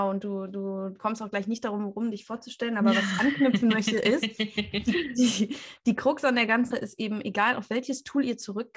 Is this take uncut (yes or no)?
no